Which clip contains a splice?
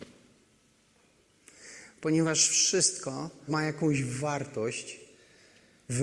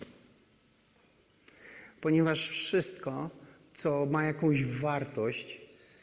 first; 1 cut; at 3.5 s

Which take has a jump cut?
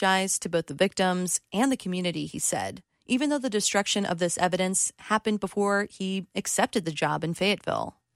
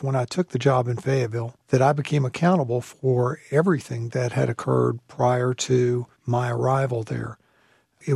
second; 2 cuts; at 1.6 s, 6.2 s

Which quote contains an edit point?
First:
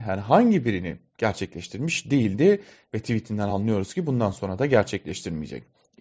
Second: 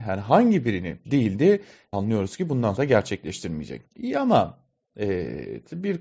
second; 4 cuts; at 1.0 s, 1.9 s, 2.8 s, 3.9 s

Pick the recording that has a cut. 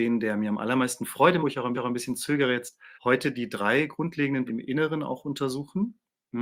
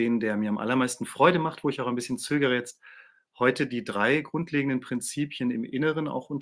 first; 4 cuts; at 1.4 s, 1.7 s, 2.9 s, 4.5 s

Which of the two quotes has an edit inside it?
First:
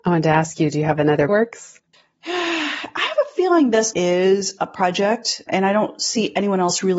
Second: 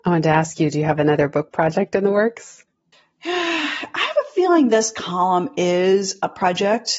first; 4 cuts; at 1.3 s, 1.9 s, 3.9 s, 5.5 s

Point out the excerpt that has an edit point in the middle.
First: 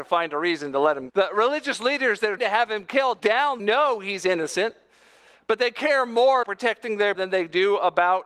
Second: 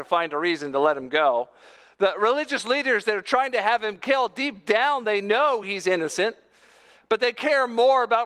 first; 6 cuts; at 1.1 s, 2.4 s, 3.2 s, 3.6 s, 6.4 s, 7.1 s

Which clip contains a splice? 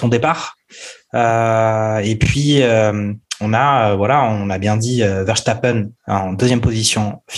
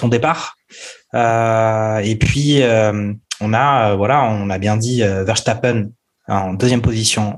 first; 1 cut; at 6.0 s

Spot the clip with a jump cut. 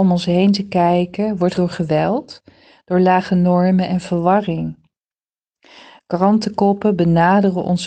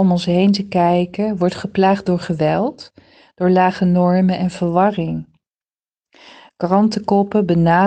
first; 1 cut; at 1.5 s

